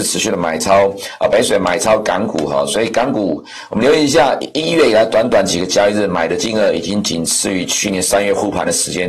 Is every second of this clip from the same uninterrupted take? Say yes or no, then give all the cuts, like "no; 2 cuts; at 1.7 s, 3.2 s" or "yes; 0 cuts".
no; 1 cut; at 4.5 s